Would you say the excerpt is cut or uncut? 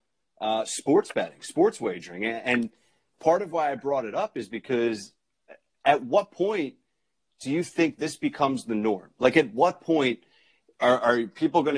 uncut